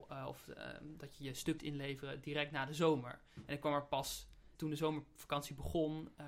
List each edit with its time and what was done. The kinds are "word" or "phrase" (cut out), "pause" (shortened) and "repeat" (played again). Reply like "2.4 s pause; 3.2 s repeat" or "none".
1.6 s word; 4.5 s word